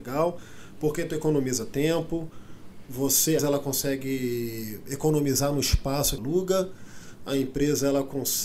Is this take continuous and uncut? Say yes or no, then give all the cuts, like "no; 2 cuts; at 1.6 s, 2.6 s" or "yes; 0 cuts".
no; 2 cuts; at 3.4 s, 6.2 s